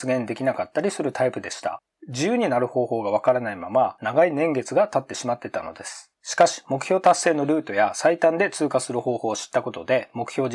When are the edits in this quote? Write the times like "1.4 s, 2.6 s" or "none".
6.2 s

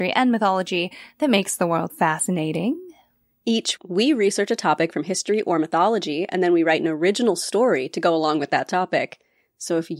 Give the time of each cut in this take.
1.9 s, 3.8 s

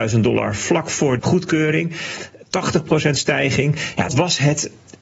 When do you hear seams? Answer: 1.2 s, 4.1 s

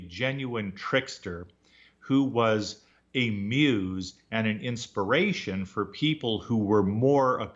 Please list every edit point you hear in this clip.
none

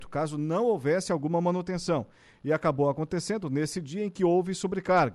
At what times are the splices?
none

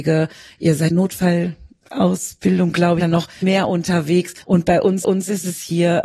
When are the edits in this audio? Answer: 0.9 s, 3.0 s, 3.4 s, 4.4 s, 5.0 s

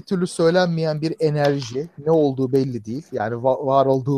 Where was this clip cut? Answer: none

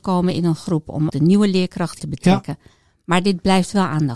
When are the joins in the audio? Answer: 1.1 s, 2.0 s

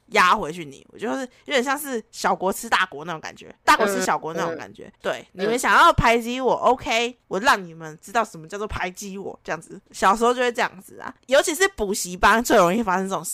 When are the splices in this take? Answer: 3.6 s, 4.9 s, 7.2 s, 9.9 s, 11.2 s

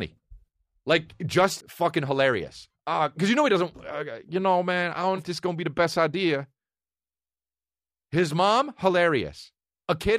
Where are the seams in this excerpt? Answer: 1.6 s, 2.7 s, 5.2 s

